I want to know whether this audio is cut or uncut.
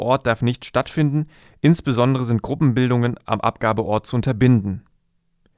uncut